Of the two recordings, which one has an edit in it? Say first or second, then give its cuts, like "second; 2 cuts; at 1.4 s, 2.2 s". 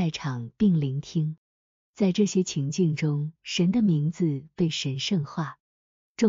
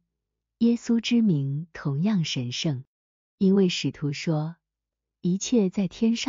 first; 1 cut; at 3.4 s